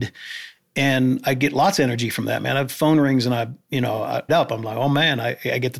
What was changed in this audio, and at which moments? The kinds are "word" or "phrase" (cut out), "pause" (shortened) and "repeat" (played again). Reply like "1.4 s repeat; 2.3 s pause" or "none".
4.3 s phrase